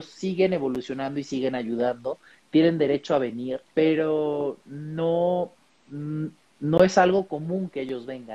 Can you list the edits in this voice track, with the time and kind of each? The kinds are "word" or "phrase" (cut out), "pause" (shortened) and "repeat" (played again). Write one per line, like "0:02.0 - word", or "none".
0:03.7 - pause